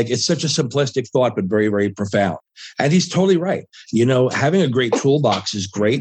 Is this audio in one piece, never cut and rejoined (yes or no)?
yes